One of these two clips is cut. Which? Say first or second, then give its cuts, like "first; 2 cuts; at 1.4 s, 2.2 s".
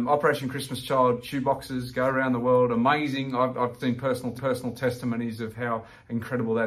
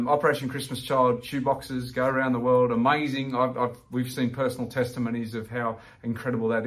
first; 2 cuts; at 3.8 s, 4.4 s